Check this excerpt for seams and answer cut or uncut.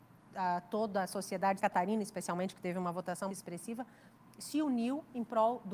cut